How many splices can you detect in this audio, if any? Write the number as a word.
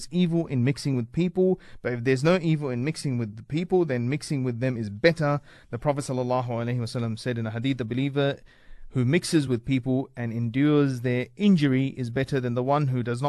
zero